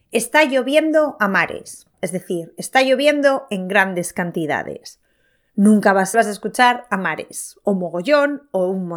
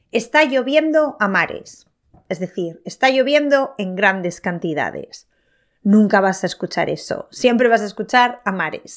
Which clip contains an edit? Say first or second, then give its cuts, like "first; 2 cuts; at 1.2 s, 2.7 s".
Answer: first; 2 cuts; at 1.9 s, 6.1 s